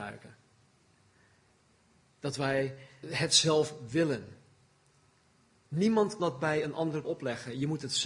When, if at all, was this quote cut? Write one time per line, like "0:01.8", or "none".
0:03.0
0:06.2
0:07.0